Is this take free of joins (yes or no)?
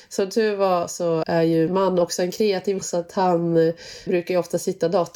no